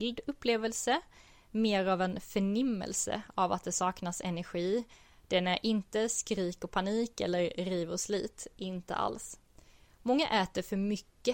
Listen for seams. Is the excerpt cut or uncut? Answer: uncut